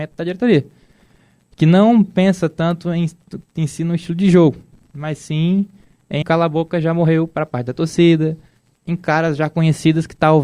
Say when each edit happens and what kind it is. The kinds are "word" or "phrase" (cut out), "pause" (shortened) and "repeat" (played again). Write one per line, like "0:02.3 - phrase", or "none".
0:06.2 - word
0:08.7 - word